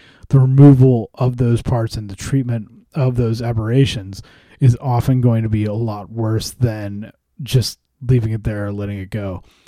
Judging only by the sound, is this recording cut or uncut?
uncut